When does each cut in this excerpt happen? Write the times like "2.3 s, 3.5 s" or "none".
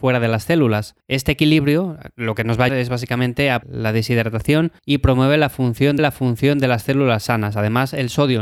1.0 s, 2.7 s, 3.6 s, 4.8 s, 6.0 s